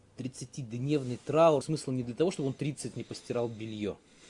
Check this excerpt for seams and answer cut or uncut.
cut